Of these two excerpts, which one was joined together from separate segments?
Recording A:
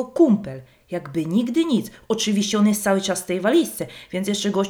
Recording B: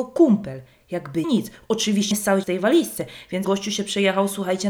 B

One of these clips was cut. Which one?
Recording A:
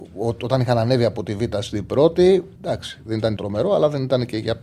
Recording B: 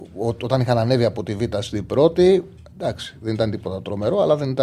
A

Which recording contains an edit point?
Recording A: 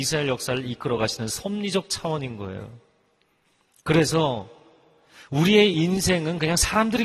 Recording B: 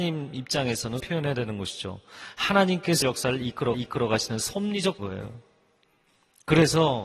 B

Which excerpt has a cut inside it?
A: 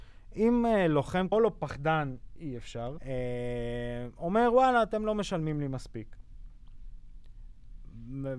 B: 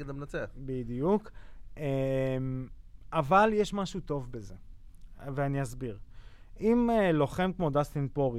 A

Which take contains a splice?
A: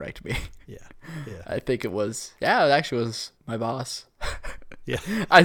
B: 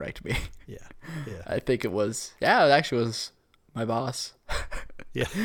A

